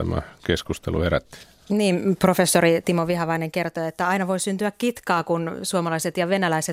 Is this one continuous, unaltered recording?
yes; 0 cuts

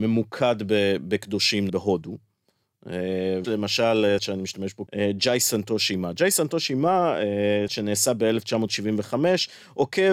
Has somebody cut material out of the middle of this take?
yes; 5 cuts; at 1.7 s, 3.4 s, 4.2 s, 4.9 s, 7.7 s

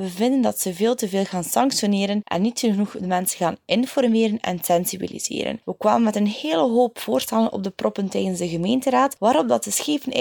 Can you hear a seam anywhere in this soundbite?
no; 0 cuts

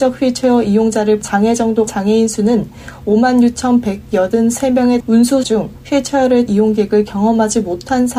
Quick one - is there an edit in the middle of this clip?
yes; 5 cuts; at 1.2 s, 1.9 s, 5.0 s, 5.4 s, 6.5 s

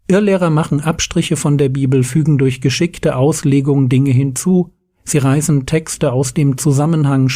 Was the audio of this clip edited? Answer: no; 0 cuts

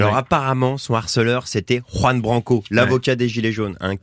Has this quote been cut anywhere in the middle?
no; 0 cuts

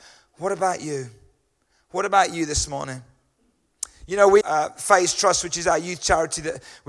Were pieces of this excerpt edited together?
yes; 1 cut; at 4.4 s

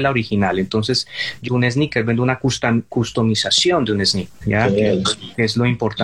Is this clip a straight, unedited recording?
no; 1 cut; at 1.5 s

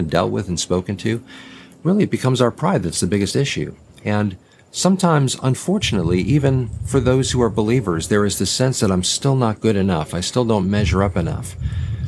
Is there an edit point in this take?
no; 0 cuts

